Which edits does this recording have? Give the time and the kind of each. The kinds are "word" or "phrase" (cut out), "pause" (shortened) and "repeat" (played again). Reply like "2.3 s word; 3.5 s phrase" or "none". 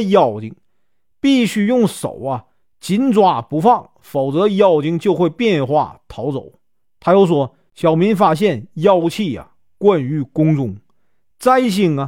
none